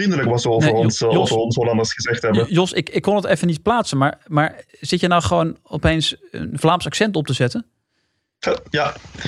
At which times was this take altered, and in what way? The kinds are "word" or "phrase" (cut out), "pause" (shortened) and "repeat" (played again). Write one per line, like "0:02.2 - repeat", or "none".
0:04.7 - pause